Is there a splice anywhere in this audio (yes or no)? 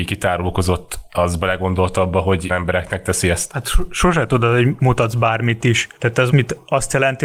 yes